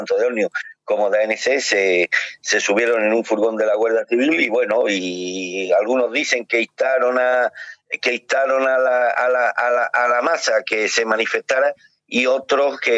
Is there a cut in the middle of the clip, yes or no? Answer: no